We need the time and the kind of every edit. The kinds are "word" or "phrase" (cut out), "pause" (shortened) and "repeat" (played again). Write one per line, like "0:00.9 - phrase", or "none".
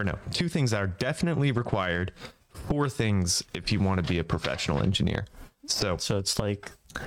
0:05.5 - pause